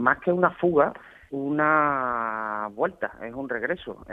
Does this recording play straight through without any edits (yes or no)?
no